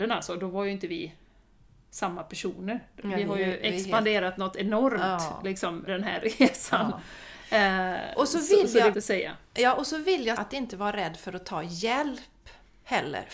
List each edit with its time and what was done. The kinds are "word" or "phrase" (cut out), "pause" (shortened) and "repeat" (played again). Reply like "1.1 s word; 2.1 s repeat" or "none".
5.9 s word; 8.9 s word; 10.4 s word